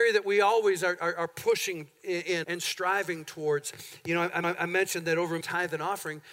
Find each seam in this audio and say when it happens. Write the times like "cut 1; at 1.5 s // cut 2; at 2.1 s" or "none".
cut 1; at 2.4 s // cut 2; at 4.4 s // cut 3; at 5.4 s